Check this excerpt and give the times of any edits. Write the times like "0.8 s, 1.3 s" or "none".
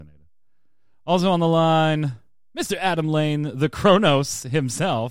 none